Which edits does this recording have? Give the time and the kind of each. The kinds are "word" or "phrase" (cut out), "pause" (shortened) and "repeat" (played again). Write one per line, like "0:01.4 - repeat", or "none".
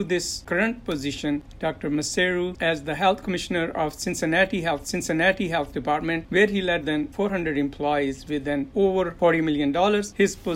0:02.5 - word
0:04.8 - repeat
0:06.8 - word
0:08.7 - phrase